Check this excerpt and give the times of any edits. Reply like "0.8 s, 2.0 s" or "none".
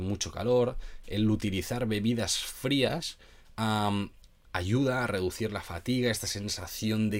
none